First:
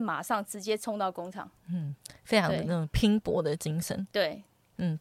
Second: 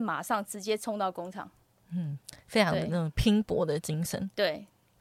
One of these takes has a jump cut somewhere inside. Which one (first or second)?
first